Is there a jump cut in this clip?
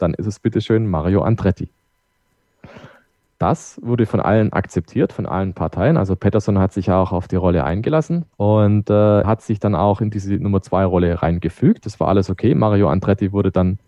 yes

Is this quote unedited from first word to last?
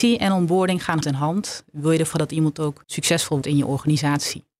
no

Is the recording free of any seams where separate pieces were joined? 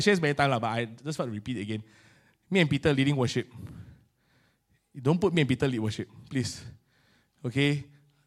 yes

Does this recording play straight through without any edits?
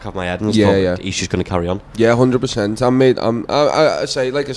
yes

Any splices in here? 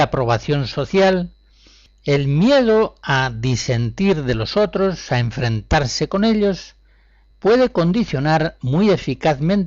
no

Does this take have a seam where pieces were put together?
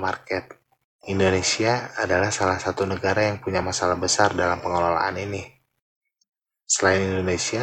no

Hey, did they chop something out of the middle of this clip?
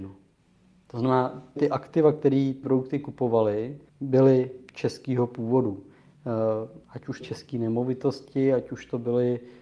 yes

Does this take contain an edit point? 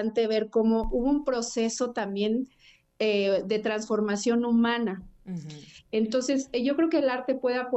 no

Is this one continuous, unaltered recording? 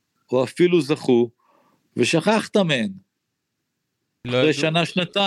yes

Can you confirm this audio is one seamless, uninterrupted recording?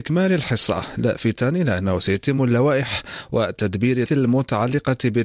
no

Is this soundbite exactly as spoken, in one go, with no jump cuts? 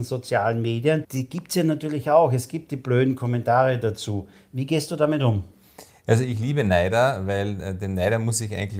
yes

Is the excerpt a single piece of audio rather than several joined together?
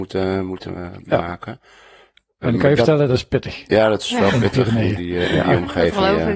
yes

